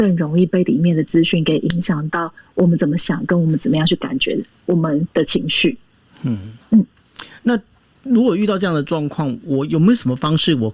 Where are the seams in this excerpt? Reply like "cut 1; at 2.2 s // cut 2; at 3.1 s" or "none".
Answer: cut 1; at 5.1 s